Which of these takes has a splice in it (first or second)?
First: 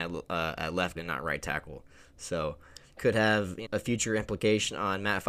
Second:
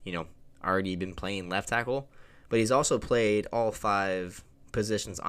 first